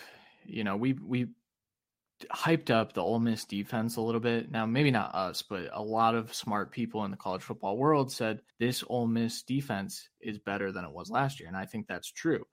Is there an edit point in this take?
yes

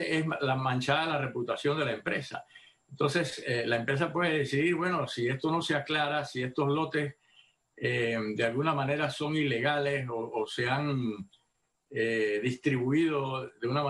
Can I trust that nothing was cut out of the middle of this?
yes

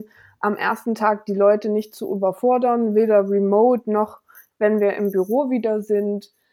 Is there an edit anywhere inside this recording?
no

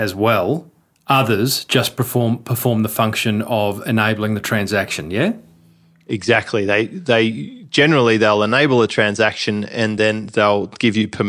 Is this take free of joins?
yes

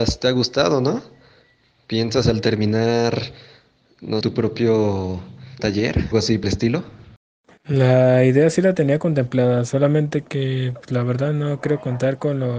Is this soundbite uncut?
no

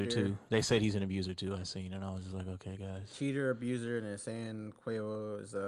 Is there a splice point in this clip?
no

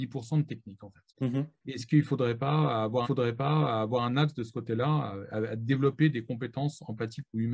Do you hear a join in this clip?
yes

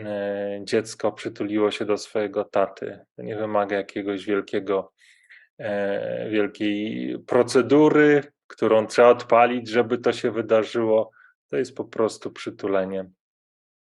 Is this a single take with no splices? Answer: yes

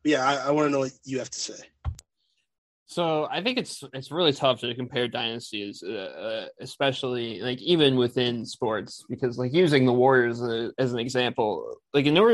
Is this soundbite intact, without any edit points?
yes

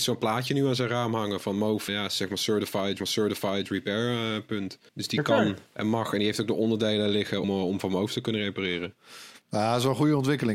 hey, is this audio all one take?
no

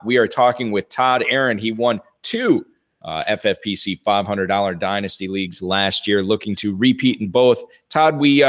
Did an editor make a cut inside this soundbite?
no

